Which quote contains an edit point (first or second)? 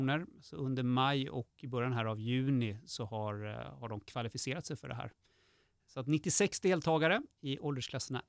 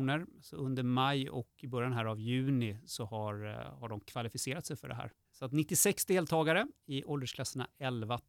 second